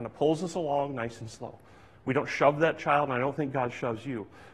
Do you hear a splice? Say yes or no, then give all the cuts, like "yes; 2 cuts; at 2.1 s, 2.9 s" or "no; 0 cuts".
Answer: no; 0 cuts